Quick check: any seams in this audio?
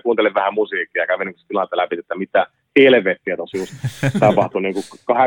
no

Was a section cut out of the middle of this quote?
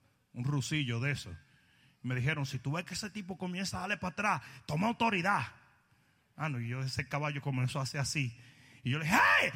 no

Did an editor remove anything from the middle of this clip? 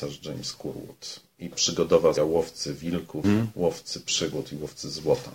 yes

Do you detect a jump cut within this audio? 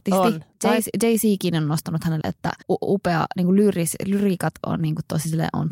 yes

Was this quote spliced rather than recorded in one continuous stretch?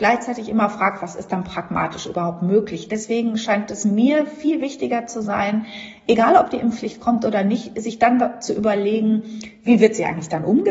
no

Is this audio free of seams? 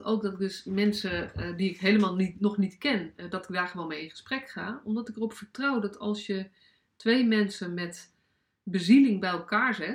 yes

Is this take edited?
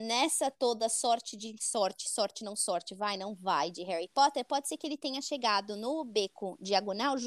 no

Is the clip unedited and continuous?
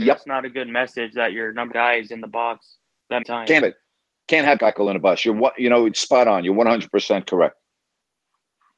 no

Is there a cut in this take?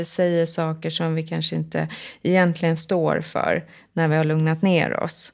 no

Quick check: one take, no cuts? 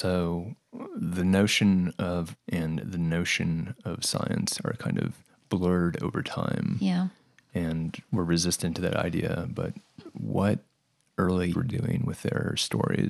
no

